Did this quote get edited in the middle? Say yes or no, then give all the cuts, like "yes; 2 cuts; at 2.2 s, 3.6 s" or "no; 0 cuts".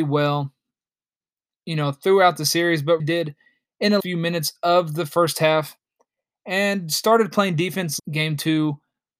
yes; 3 cuts; at 3.0 s, 4.0 s, 8.0 s